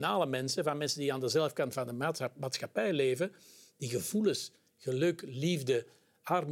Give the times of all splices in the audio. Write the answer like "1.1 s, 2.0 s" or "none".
none